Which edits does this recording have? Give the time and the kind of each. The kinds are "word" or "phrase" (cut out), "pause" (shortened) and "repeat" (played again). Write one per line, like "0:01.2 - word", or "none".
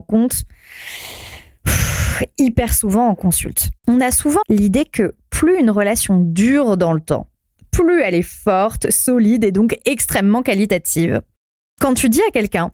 0:03.8 - pause
0:04.4 - phrase